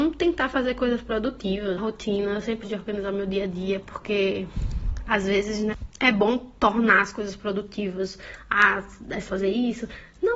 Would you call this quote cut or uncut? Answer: cut